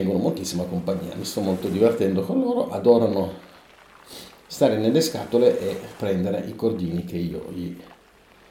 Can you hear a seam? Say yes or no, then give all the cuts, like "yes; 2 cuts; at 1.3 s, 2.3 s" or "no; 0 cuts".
no; 0 cuts